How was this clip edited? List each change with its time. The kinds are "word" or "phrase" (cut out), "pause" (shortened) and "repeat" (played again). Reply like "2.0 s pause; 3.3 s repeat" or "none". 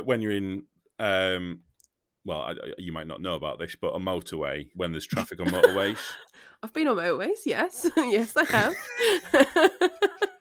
4.7 s word